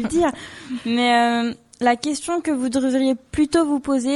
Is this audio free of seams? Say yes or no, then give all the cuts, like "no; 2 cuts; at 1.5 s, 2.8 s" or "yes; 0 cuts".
yes; 0 cuts